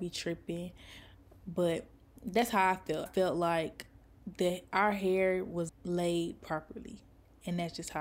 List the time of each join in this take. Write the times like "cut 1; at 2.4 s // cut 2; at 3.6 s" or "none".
cut 1; at 3.1 s // cut 2; at 5.7 s